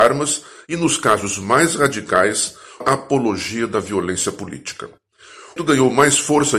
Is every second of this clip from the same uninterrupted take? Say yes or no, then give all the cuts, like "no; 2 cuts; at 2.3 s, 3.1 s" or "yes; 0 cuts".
no; 2 cuts; at 2.8 s, 5.6 s